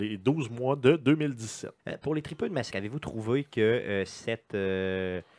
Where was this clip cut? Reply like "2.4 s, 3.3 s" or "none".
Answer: 1.8 s, 2.7 s